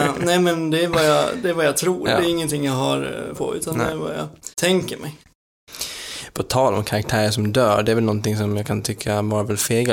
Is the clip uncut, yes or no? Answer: no